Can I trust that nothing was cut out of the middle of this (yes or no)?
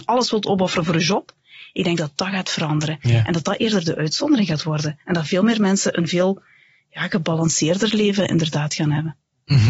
yes